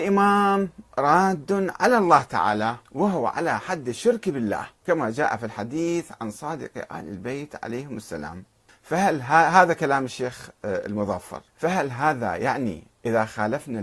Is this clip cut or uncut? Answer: cut